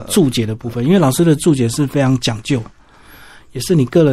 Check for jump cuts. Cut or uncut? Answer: uncut